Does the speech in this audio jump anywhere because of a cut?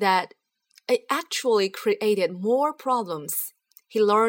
no; 0 cuts

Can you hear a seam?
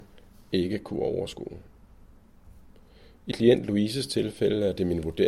yes; 1 cut; at 3.3 s

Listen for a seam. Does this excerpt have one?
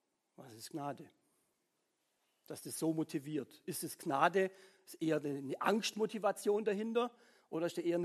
no; 0 cuts

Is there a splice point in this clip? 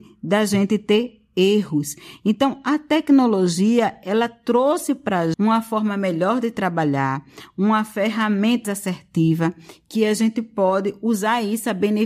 yes; 2 cuts; at 5.3 s, 8.6 s

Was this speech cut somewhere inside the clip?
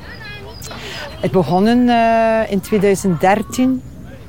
yes; 1 cut; at 1.3 s

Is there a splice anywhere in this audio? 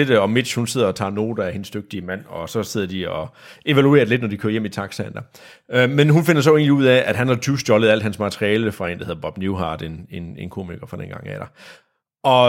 no; 0 cuts

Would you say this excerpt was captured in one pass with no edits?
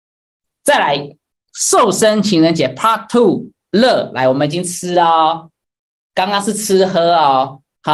yes; 0 cuts

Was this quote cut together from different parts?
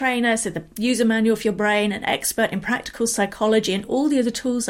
no; 0 cuts

